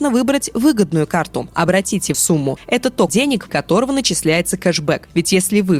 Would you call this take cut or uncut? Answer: cut